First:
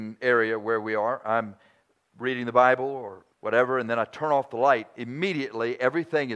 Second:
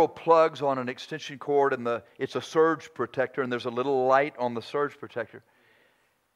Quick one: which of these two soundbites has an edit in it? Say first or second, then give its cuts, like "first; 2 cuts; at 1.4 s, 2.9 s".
first; 1 cut; at 3.3 s